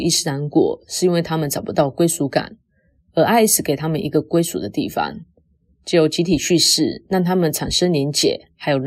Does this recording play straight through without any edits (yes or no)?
yes